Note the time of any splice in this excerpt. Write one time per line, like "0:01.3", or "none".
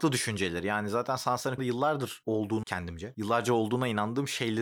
0:01.6
0:02.6